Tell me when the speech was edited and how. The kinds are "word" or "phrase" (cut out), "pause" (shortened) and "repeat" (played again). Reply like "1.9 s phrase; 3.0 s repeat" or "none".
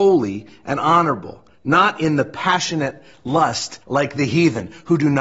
1.5 s pause; 3.8 s pause